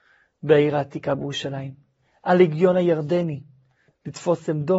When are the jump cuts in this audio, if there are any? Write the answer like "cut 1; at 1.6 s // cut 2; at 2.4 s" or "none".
cut 1; at 3.9 s